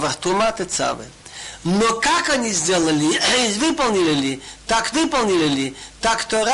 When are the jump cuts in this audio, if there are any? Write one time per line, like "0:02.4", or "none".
0:04.9

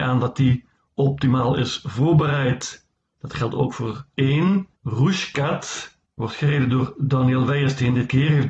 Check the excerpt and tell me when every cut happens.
0:04.1

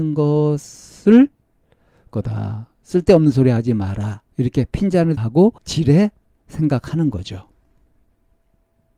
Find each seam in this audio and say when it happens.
0:02.1
0:02.7
0:04.3
0:05.2
0:05.6

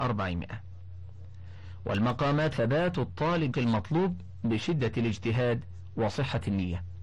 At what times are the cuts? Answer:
0:02.5
0:03.5

